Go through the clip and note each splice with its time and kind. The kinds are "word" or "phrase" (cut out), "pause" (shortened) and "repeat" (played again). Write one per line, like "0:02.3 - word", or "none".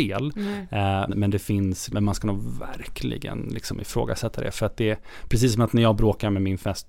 0:01.1 - word
0:01.9 - word

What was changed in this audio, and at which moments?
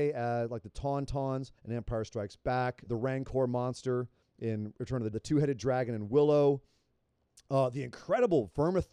0:01.6 - pause
0:02.9 - word
0:04.2 - pause
0:05.1 - word

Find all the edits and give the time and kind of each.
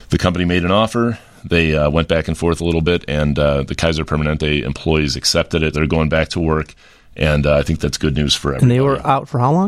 0:05.7 - word

